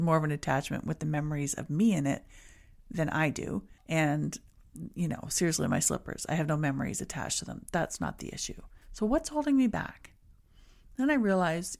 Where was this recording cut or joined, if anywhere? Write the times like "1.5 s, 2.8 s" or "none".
3.8 s, 8.8 s